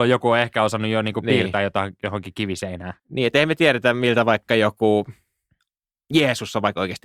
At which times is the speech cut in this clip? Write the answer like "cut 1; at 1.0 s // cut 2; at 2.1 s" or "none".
cut 1; at 3.0 s